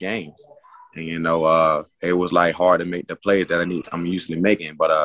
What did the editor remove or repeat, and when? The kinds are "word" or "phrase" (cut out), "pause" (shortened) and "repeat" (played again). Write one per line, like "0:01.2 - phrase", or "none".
0:01.9 - pause